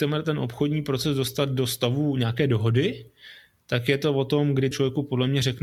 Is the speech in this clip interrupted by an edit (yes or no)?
yes